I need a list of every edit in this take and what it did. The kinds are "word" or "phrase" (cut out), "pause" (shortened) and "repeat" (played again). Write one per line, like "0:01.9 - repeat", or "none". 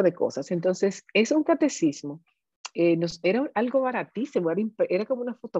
none